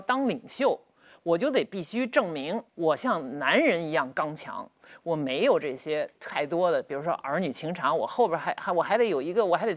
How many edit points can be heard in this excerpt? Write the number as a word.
one